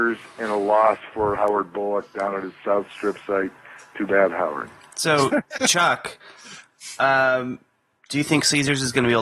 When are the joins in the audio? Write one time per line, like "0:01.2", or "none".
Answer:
0:01.3
0:05.6